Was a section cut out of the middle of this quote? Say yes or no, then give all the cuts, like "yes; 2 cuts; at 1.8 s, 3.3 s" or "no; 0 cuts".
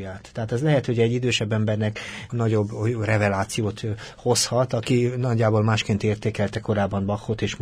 yes; 1 cut; at 2.3 s